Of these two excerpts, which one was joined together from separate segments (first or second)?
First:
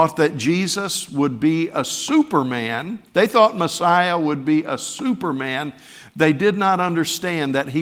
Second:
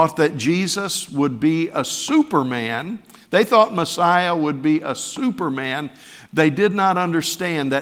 first